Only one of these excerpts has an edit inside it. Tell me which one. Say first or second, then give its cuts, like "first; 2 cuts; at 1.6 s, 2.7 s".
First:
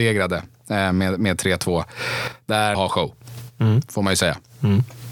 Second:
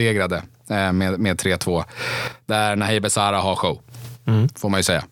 first; 1 cut; at 2.7 s